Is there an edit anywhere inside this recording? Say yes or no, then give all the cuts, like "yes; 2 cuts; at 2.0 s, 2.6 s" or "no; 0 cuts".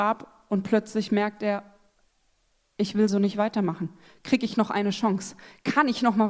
no; 0 cuts